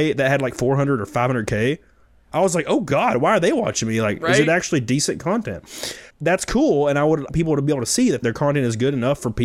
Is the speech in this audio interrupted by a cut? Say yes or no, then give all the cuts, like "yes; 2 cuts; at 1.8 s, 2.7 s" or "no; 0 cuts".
yes; 3 cuts; at 6.1 s, 7.3 s, 8.2 s